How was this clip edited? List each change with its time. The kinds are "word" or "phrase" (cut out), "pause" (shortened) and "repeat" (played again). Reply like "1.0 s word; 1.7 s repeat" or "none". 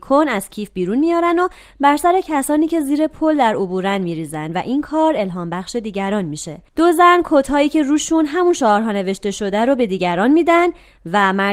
6.7 s pause